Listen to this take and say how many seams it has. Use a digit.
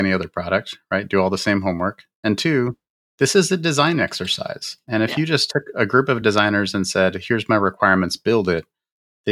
0